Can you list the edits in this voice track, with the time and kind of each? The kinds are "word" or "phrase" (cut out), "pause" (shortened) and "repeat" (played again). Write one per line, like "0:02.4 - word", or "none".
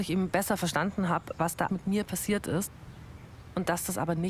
0:01.7 - word